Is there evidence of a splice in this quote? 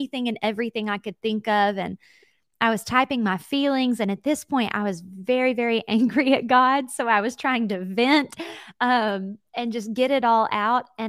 no; 0 cuts

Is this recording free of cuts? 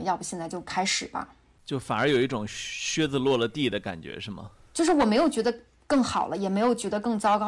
yes; 0 cuts

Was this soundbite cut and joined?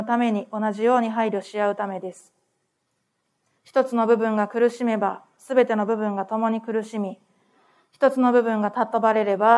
no; 0 cuts

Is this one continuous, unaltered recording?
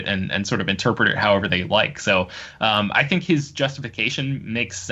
yes; 0 cuts

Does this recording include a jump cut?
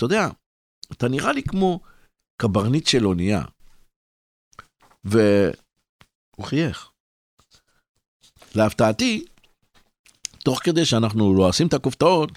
no; 0 cuts

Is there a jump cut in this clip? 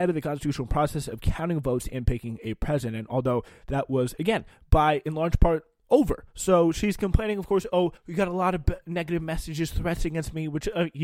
yes; 1 cut; at 8.0 s

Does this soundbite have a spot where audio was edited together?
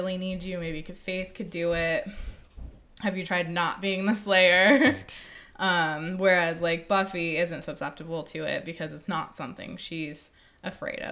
yes; 1 cut; at 3.2 s

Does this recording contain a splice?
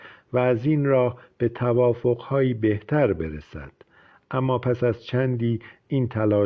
no; 0 cuts

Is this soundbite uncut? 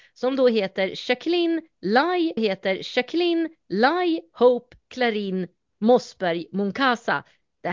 no; 2 cuts; at 2.4 s, 5.7 s

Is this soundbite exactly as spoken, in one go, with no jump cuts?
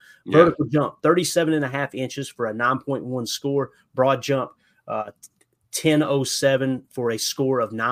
yes; 0 cuts

